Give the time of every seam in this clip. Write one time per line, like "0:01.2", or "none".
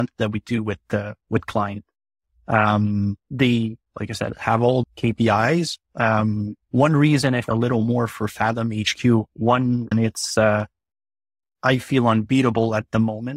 0:03.2
0:04.8
0:07.5
0:09.9

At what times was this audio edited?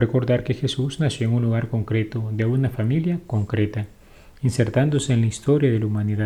none

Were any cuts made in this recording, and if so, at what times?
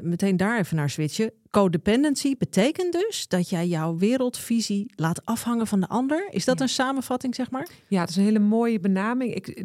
none

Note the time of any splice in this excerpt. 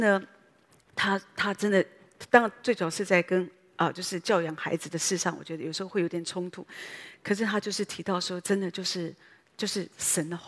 none

